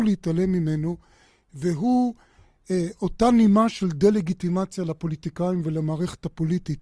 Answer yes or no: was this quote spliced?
no